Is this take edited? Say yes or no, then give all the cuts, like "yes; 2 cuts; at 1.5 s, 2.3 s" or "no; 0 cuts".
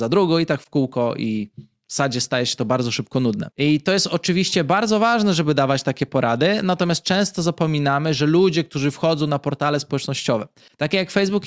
no; 0 cuts